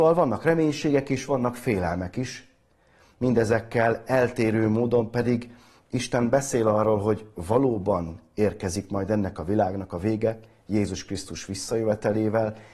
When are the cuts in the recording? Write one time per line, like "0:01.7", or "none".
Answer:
none

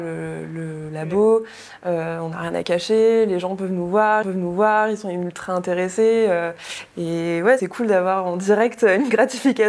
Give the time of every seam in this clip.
0:04.2
0:07.6

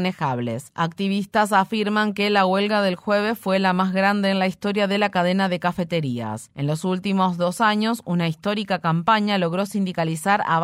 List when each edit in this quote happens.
none

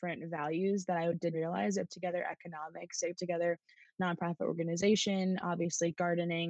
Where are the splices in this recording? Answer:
0:01.3
0:01.9
0:03.2

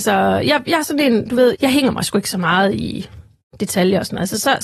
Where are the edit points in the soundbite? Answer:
0:01.5

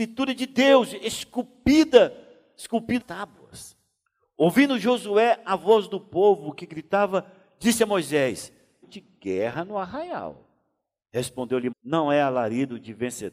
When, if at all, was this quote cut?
0:03.0
0:08.8
0:11.7

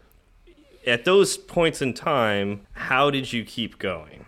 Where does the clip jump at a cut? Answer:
0:02.6

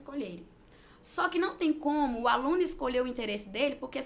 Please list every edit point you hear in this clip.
none

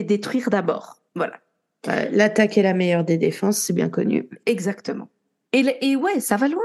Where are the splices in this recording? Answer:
0:01.1

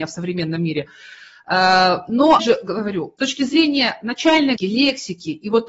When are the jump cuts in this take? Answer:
0:02.4
0:03.2
0:04.6

